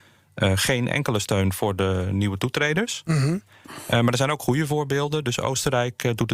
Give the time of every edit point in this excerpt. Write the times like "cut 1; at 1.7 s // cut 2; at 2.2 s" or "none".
cut 1; at 3.5 s